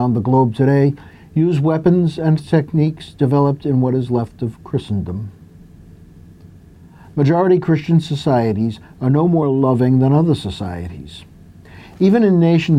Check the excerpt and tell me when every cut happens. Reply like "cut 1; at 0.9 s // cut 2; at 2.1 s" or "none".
none